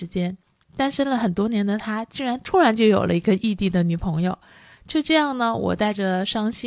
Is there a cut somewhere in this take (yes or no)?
no